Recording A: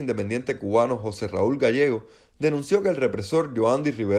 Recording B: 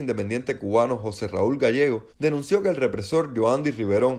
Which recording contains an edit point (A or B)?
B